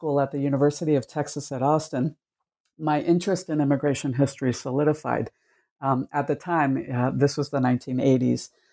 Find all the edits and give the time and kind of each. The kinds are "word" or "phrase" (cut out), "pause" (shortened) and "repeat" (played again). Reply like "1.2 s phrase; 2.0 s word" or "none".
none